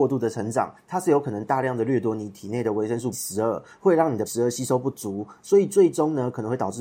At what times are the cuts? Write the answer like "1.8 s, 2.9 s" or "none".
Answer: 3.1 s, 4.3 s